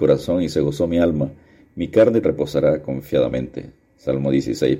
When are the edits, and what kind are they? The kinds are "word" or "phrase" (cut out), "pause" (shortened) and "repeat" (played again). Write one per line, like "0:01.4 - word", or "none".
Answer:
0:02.2 - word